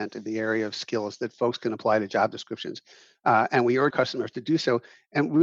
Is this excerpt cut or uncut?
cut